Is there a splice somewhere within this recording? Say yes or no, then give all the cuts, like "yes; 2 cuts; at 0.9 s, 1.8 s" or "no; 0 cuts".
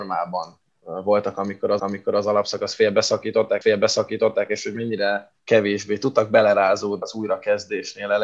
yes; 4 cuts; at 1.8 s, 3.6 s, 5.4 s, 7.0 s